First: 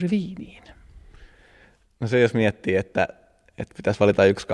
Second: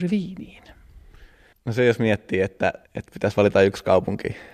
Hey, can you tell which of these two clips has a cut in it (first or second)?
second